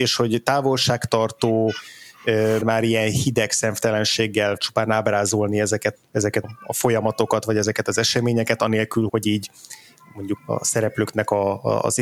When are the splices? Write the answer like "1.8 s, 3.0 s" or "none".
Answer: 2.6 s, 4.6 s, 6.0 s, 6.4 s, 9.1 s, 10.4 s